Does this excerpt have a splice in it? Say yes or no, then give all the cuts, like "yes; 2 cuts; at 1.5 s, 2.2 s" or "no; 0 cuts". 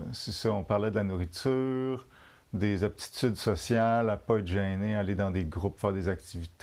no; 0 cuts